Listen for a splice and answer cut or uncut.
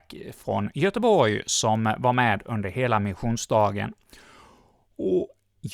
uncut